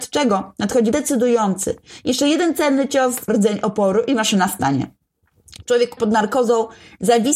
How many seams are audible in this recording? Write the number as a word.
three